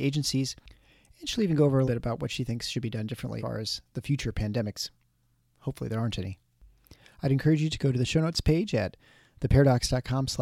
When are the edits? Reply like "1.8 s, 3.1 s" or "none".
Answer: 1.8 s, 3.4 s

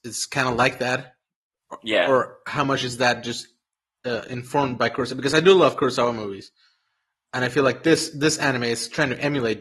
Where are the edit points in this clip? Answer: none

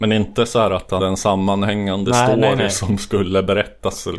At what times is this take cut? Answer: 1.0 s

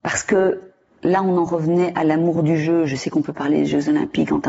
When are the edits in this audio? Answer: none

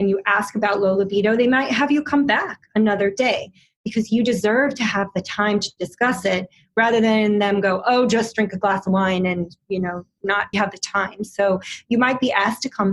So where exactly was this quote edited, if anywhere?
10.5 s

